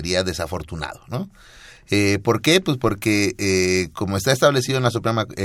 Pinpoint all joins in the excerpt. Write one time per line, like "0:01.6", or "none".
none